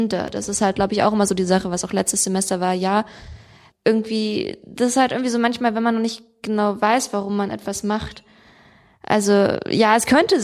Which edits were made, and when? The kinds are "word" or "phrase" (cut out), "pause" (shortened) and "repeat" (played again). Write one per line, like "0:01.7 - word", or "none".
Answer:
0:03.7 - word

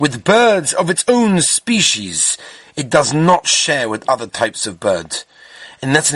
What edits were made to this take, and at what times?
none

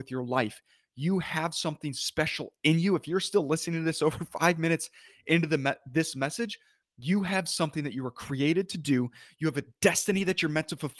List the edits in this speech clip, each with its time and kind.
none

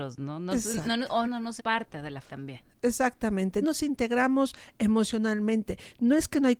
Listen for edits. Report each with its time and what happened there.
0:01.2 - phrase
0:01.6 - word
0:02.2 - word
0:03.6 - word

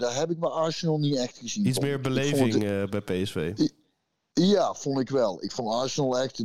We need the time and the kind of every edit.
none

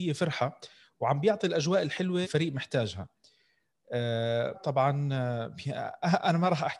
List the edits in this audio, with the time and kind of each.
0:02.2 - word
0:04.5 - word

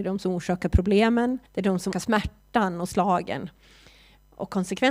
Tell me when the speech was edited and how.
0:01.5 - pause
0:01.9 - word

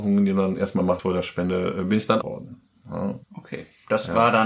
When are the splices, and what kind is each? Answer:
0:01.0 - word
0:02.2 - word
0:03.2 - pause

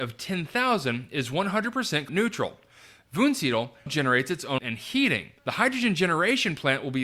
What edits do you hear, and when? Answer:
0:02.1 - word
0:03.9 - word
0:04.6 - word
0:05.4 - pause

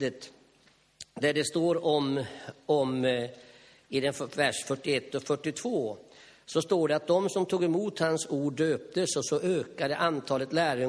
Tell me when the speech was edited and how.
none

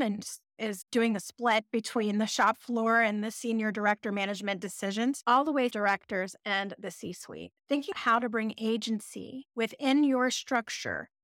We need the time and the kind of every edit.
0:05.7 - phrase
0:07.9 - word
0:09.5 - pause

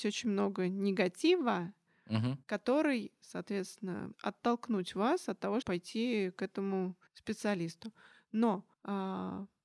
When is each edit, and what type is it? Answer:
0:02.4 - pause
0:04.1 - word
0:05.6 - word
0:07.1 - pause
0:08.7 - pause

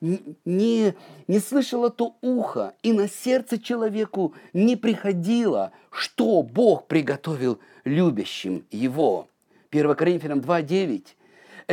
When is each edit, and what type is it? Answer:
none

